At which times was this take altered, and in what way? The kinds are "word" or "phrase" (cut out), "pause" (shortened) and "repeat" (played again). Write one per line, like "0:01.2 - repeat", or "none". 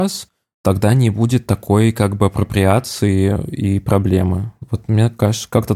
none